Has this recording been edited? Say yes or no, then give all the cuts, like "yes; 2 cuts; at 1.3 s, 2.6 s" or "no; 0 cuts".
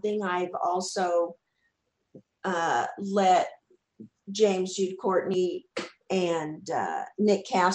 no; 0 cuts